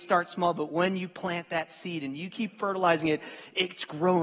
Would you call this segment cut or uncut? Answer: cut